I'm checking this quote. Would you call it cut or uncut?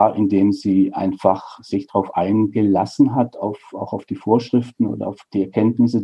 uncut